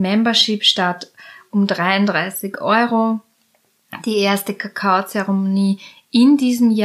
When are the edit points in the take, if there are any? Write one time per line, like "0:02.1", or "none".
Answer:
none